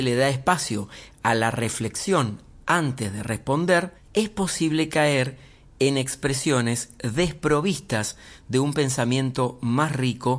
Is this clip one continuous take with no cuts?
yes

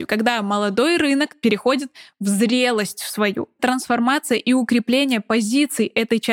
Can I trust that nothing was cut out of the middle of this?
no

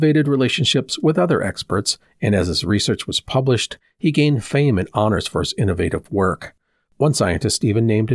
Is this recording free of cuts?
yes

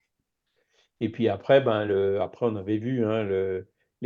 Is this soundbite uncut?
yes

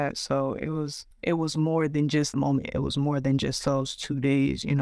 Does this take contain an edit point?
yes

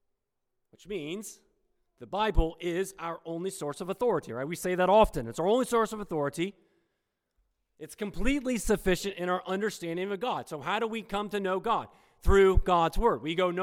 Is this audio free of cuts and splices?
yes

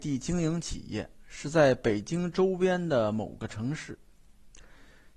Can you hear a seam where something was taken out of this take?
no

